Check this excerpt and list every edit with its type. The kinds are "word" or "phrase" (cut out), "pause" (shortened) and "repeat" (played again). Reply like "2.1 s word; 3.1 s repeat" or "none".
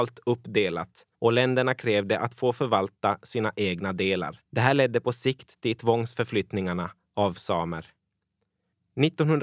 1.1 s pause; 4.4 s pause